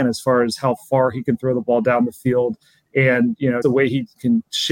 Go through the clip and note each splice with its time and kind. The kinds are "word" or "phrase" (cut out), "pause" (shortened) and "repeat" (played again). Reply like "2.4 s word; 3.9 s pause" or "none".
3.6 s word